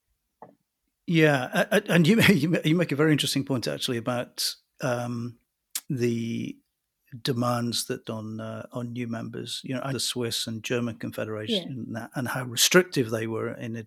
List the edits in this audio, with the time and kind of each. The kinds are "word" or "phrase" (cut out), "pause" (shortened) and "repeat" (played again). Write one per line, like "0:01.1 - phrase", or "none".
0:05.8 - pause
0:08.0 - phrase
0:09.9 - phrase